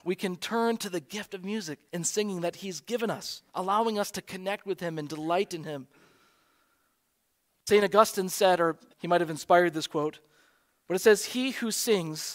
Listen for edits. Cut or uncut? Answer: cut